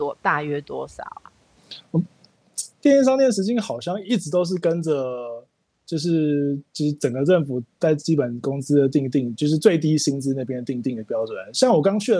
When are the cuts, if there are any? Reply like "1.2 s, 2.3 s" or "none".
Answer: none